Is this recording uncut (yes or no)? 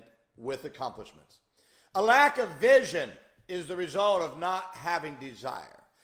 yes